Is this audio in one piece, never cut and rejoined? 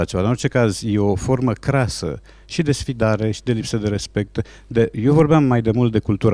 yes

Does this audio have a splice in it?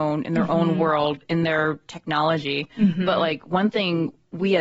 no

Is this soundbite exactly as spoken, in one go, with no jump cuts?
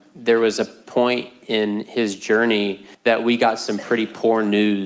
no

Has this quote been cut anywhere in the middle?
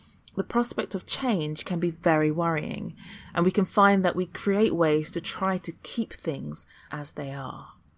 yes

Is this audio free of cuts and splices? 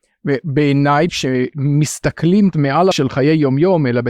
no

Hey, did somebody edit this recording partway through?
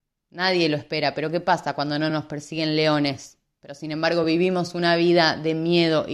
no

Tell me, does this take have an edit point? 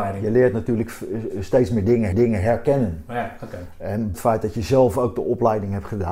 yes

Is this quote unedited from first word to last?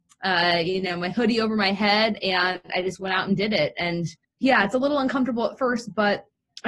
no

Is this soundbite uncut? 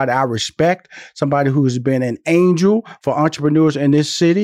yes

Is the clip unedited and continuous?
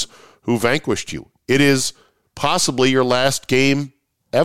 yes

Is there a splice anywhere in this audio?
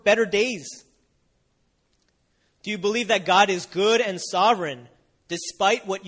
no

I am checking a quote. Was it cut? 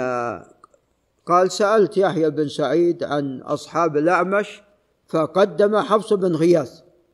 no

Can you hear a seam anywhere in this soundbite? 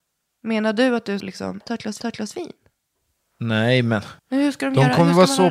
yes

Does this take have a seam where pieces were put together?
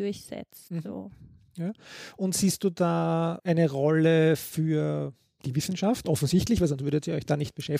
no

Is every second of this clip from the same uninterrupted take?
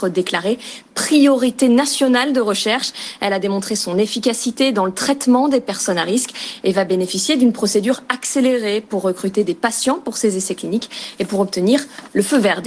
yes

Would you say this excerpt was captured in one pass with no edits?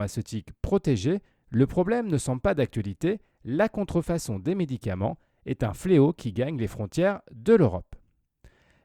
yes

